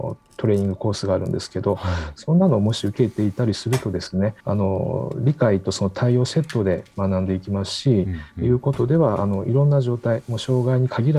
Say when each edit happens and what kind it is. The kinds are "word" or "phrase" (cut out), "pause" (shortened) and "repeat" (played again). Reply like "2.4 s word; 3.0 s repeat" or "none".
4.4 s pause